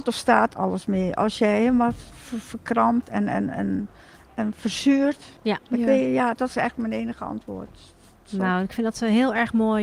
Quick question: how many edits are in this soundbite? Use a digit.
1